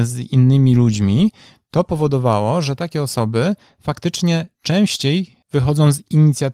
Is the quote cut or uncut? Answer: uncut